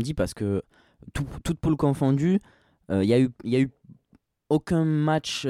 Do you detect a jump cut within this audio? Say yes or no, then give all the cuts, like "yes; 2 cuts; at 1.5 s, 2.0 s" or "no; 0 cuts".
no; 0 cuts